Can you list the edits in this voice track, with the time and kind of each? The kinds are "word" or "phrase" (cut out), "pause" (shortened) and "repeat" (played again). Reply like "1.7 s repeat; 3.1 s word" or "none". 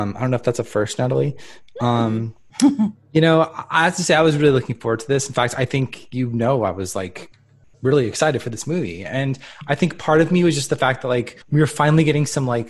11.4 s pause